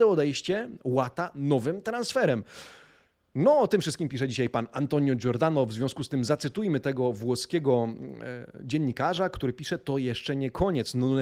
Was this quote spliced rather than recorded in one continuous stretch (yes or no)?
no